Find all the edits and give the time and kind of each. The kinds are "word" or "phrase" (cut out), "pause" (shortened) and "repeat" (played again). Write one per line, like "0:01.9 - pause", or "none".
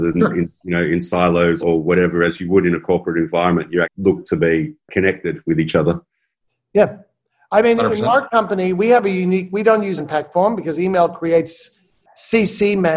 0:01.6 - word
0:03.8 - word
0:10.0 - word